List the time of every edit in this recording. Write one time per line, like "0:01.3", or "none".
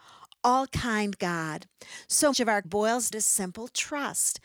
0:02.3
0:02.6
0:03.1